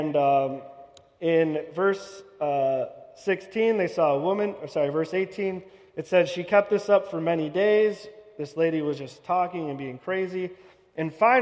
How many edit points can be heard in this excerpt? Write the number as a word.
zero